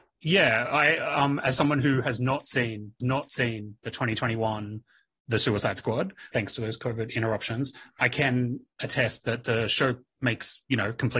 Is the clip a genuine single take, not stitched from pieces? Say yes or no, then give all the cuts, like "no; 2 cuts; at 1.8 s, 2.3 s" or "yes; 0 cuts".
no; 1 cut; at 3.0 s